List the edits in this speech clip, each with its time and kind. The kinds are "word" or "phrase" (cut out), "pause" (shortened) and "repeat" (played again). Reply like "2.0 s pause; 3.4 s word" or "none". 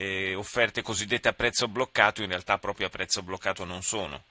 none